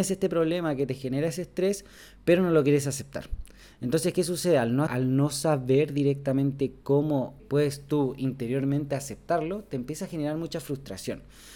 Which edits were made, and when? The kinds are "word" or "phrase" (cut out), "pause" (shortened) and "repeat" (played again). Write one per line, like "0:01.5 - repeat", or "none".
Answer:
0:04.9 - word
0:07.4 - word